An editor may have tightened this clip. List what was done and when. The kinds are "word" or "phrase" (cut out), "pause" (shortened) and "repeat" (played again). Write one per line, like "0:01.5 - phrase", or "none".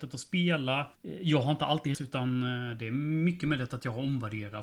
0:00.9 - pause
0:01.9 - word